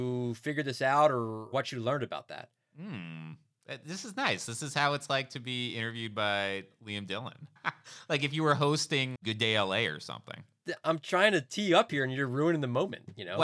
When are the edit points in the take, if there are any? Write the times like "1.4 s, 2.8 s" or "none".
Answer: 9.2 s